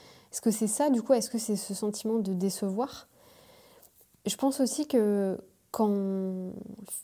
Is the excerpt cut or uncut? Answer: uncut